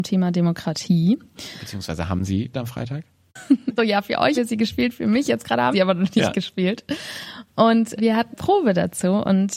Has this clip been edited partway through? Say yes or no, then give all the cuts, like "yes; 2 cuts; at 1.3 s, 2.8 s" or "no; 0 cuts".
yes; 6 cuts; at 2.5 s, 3.8 s, 4.4 s, 5.7 s, 8.0 s, 8.3 s